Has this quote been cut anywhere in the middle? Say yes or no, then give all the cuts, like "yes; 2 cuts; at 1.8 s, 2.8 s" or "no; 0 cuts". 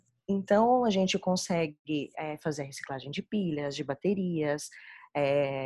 no; 0 cuts